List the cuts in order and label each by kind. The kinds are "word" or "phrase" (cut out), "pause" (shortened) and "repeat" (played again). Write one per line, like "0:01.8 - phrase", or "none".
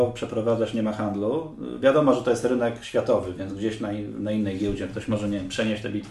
none